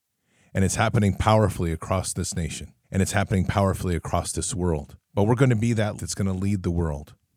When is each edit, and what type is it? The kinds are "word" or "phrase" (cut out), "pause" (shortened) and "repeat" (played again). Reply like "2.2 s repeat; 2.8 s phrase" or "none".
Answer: 2.8 s pause; 5.0 s pause; 6.0 s word